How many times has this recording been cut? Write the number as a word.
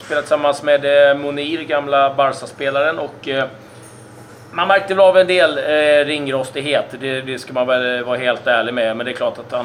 zero